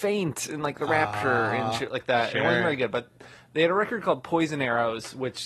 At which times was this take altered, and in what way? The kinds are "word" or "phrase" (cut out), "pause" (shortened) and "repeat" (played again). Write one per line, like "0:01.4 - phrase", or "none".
none